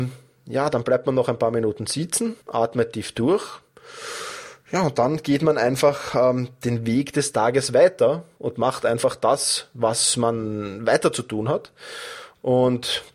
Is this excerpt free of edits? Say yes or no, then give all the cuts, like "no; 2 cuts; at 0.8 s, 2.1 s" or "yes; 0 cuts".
no; 1 cut; at 2.4 s